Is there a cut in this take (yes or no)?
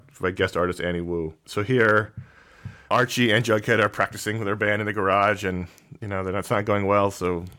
no